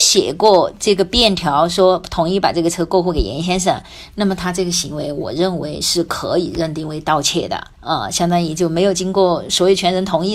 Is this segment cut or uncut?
cut